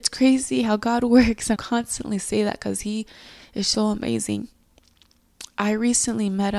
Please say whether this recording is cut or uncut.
cut